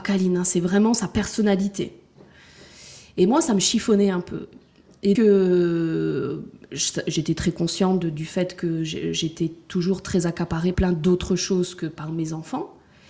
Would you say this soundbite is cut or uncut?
cut